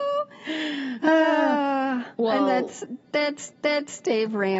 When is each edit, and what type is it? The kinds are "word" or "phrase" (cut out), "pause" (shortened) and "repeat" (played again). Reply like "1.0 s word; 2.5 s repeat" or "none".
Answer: 2.1 s pause; 3.5 s repeat